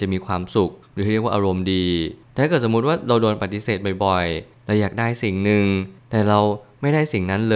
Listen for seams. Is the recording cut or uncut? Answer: uncut